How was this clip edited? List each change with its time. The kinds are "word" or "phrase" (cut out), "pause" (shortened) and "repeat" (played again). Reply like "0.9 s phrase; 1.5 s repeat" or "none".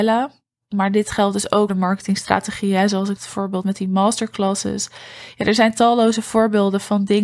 1.7 s word; 3.2 s word; 3.6 s word